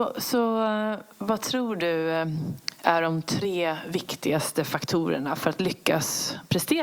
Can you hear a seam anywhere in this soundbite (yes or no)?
yes